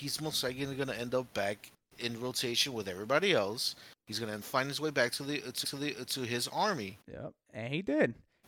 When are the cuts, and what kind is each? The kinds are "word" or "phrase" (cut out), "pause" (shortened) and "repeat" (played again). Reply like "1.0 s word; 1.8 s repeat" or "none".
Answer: 4.4 s word; 5.6 s repeat; 7.0 s pause